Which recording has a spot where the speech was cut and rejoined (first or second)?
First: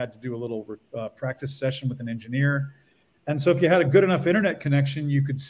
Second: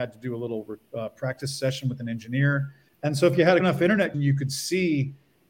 second